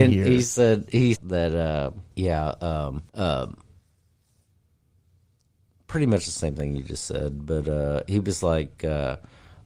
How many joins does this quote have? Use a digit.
3